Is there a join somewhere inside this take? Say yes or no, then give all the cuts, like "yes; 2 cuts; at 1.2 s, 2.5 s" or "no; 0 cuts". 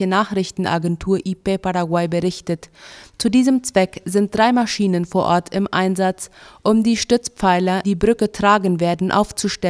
yes; 1 cut; at 7.8 s